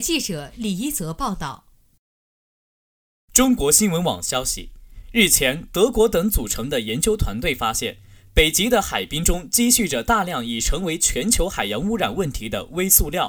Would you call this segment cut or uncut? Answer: uncut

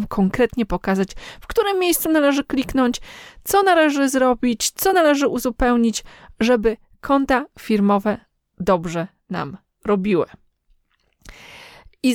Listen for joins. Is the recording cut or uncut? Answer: uncut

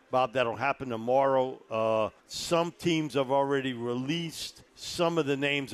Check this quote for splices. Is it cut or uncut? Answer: cut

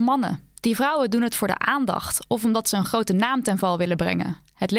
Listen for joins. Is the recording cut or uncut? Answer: uncut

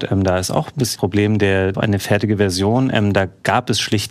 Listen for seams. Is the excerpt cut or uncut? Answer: cut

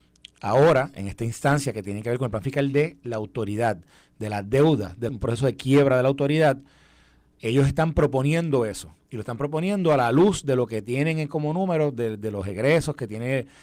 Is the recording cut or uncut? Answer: cut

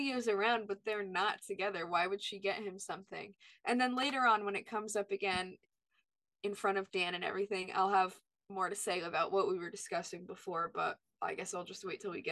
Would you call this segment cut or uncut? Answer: uncut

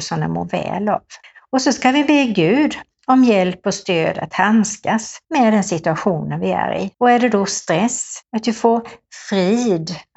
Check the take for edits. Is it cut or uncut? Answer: cut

